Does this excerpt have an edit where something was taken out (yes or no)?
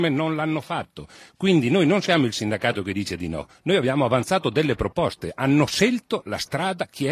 no